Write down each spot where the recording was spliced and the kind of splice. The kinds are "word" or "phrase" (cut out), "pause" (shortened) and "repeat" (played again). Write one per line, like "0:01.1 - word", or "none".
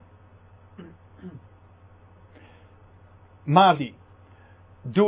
0:03.8 - word